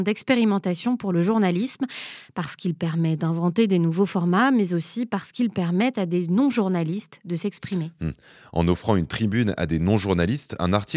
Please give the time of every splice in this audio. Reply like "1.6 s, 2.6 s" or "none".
none